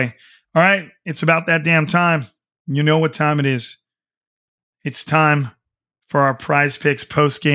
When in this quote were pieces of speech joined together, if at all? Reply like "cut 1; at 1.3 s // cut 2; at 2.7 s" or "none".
none